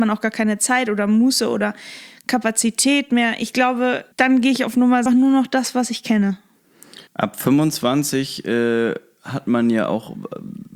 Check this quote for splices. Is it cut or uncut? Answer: cut